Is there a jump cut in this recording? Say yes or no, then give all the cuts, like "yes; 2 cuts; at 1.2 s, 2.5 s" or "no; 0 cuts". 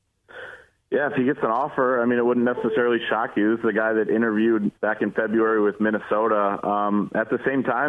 yes; 1 cut; at 4.8 s